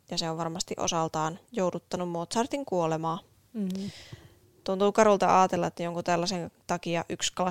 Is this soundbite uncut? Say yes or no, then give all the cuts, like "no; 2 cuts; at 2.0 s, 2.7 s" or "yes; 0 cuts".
yes; 0 cuts